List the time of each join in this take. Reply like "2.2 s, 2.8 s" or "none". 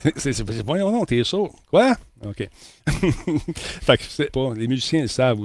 4.3 s